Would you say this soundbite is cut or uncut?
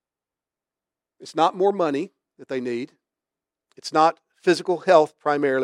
uncut